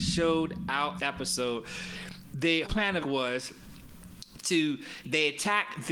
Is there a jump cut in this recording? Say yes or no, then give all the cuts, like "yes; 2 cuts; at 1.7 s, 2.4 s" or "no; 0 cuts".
yes; 4 cuts; at 1.0 s, 2.6 s, 3.0 s, 5.0 s